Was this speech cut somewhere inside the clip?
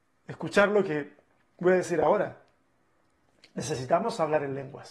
no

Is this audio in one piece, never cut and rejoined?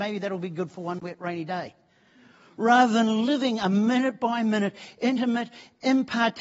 yes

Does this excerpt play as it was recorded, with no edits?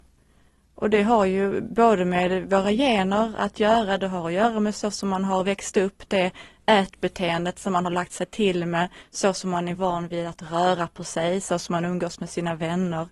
yes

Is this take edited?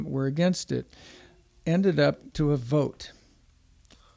yes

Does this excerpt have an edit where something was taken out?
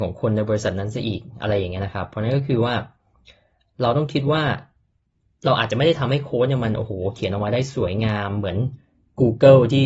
no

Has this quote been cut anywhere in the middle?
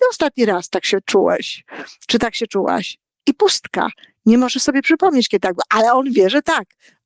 no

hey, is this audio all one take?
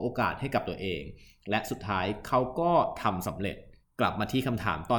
no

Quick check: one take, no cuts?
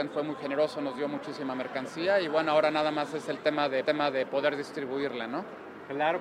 no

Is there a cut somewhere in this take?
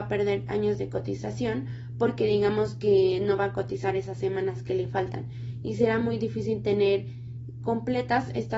no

